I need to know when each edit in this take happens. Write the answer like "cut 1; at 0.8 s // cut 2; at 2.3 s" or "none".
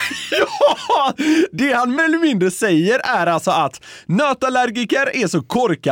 cut 1; at 2.0 s